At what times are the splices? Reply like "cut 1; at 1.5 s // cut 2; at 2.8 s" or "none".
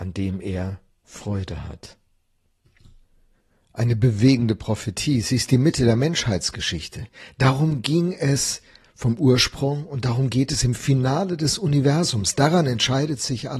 none